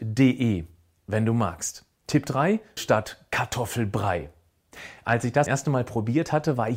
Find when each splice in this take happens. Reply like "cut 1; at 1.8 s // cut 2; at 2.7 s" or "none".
cut 1; at 1.9 s // cut 2; at 2.8 s // cut 3; at 5.5 s